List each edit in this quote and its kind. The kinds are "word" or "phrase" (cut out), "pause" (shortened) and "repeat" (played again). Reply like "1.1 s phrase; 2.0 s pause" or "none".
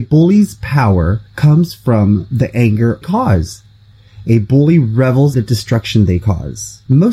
1.3 s pause; 3.0 s phrase; 5.3 s word